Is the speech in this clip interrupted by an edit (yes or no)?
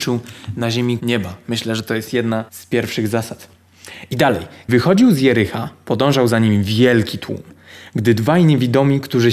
yes